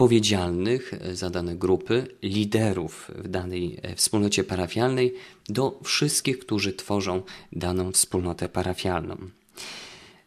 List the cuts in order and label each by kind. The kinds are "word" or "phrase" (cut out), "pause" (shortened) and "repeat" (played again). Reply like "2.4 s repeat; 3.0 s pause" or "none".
3.8 s word